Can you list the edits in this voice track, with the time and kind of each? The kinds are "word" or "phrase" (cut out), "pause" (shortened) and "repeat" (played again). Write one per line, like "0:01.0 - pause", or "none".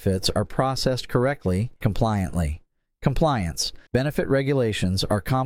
0:01.8 - word
0:03.9 - pause